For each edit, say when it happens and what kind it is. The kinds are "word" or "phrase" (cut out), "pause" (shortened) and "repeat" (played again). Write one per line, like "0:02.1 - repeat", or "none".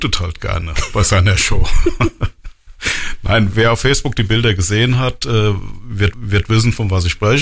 0:03.5 - word
0:06.1 - repeat